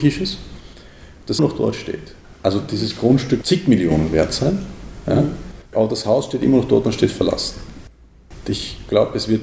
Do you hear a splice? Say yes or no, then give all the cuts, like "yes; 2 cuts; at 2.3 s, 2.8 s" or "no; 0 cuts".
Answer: yes; 4 cuts; at 1.4 s, 2.2 s, 3.4 s, 5.6 s